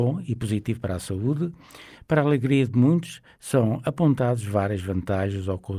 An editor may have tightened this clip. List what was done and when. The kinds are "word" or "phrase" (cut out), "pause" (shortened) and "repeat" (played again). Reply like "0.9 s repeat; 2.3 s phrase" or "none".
none